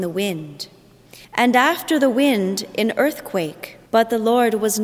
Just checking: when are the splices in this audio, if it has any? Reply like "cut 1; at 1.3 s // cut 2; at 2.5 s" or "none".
cut 1; at 1.2 s // cut 2; at 3.9 s